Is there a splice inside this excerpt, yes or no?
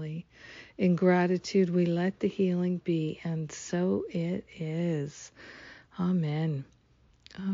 no